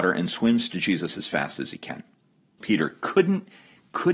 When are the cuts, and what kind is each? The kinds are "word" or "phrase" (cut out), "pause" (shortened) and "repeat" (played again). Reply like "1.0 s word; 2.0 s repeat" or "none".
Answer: 2.6 s phrase